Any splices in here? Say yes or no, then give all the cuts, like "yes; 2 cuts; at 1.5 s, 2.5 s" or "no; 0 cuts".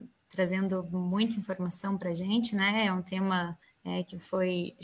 yes; 1 cut; at 3.6 s